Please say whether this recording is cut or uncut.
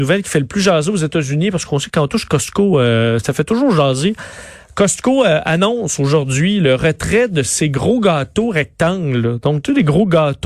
uncut